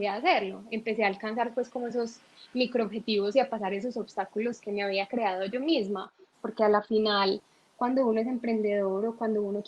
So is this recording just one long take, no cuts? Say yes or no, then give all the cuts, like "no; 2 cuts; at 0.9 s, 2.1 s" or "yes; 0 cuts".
yes; 0 cuts